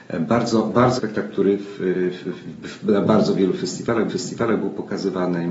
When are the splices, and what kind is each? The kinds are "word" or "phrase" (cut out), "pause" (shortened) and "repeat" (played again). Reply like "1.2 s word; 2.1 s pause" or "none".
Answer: 1.0 s phrase; 4.1 s repeat